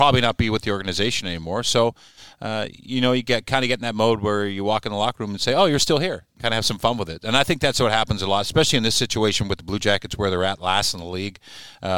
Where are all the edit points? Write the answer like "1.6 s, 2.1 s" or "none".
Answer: none